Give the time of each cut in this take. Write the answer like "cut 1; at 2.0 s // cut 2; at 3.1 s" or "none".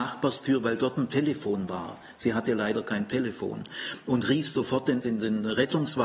cut 1; at 5.0 s